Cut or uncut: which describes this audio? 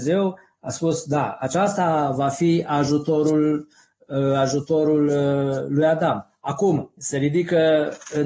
cut